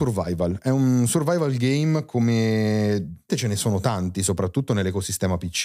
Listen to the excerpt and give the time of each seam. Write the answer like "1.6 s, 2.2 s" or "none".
3.3 s